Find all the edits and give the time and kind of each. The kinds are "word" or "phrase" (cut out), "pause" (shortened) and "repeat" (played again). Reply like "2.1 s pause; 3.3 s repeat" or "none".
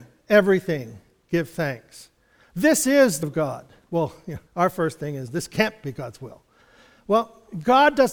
3.2 s word; 4.5 s pause